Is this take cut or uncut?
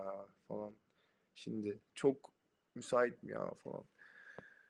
cut